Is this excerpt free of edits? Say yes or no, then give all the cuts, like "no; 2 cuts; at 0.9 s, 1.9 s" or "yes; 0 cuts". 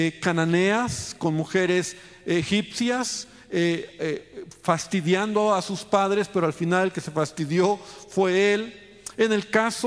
yes; 0 cuts